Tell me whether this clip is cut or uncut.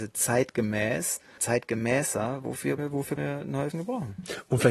cut